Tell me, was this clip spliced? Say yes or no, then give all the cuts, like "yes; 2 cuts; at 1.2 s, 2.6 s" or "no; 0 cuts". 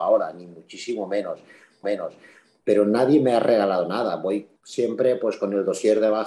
yes; 2 cuts; at 1.8 s, 4.6 s